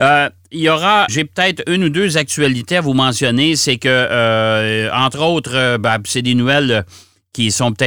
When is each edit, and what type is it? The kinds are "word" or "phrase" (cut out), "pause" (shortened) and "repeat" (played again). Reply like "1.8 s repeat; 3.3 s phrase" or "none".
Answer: 1.1 s word